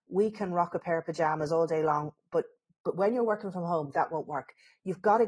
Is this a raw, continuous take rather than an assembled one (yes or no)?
yes